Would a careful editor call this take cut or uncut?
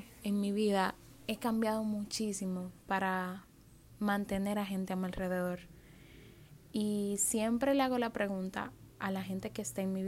uncut